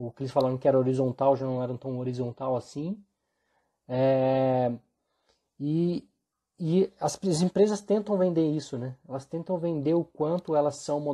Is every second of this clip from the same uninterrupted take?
yes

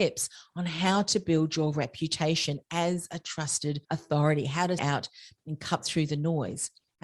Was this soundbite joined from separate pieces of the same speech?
yes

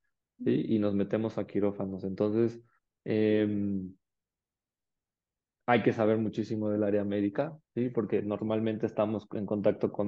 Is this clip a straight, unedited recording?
no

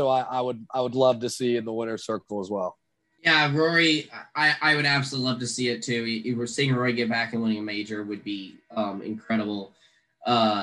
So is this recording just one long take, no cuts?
yes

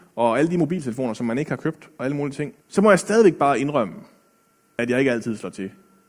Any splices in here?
yes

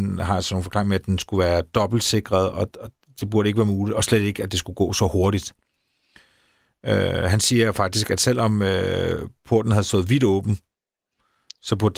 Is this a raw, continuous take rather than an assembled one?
yes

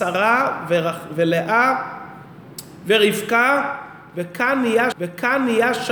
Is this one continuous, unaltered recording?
no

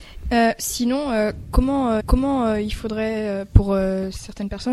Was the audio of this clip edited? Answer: yes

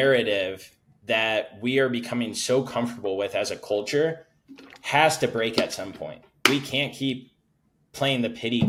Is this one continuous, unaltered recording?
yes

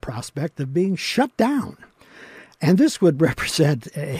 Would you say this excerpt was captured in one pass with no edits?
yes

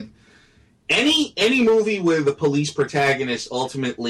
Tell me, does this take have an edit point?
no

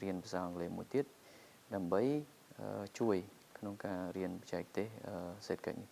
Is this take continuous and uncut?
yes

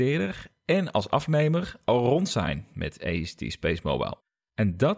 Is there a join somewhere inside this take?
no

